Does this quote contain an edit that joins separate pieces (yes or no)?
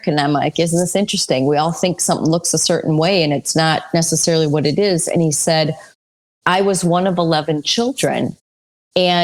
no